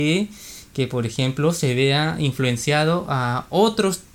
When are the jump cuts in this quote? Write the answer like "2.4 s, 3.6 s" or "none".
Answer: none